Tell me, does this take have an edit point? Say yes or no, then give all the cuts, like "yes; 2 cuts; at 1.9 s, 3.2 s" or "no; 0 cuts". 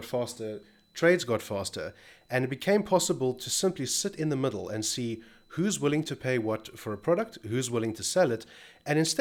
no; 0 cuts